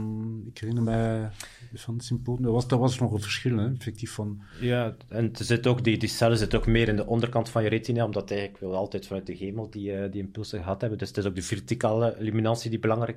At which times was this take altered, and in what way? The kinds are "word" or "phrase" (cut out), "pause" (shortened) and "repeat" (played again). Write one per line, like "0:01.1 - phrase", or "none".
none

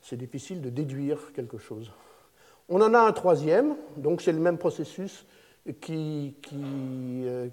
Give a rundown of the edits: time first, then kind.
none

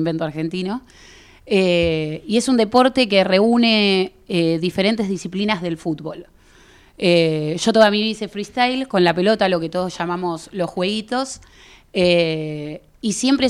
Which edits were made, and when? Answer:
none

